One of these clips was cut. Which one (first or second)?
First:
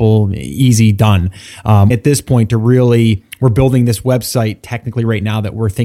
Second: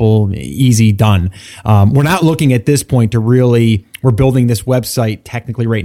first